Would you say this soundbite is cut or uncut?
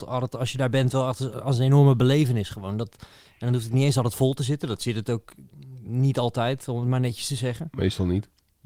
uncut